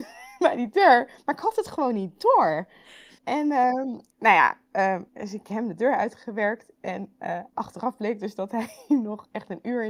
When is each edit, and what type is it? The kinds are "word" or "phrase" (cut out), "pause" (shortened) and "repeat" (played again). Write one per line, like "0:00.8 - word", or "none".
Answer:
0:03.2 - pause
0:04.1 - pause
0:05.1 - pause
0:07.5 - pause